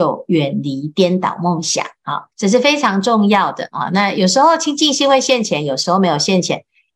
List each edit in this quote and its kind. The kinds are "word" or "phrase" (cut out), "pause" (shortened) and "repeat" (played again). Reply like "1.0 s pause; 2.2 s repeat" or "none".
2.3 s pause